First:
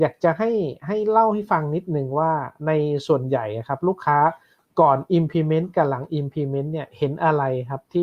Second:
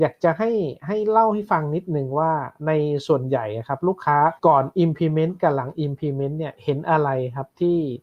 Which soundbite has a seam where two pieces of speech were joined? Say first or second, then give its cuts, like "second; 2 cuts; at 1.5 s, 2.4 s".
second; 1 cut; at 4.4 s